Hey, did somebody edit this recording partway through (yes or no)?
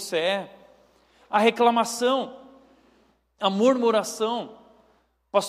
no